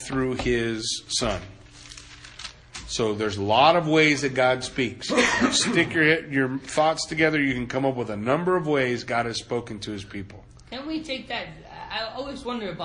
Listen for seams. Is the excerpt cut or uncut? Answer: uncut